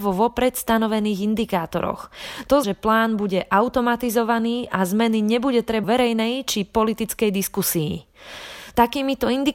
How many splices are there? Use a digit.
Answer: 2